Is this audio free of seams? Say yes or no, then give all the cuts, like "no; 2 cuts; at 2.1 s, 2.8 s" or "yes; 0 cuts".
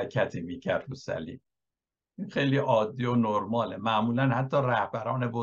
yes; 0 cuts